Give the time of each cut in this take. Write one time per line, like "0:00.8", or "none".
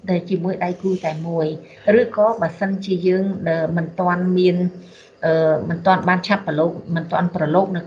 none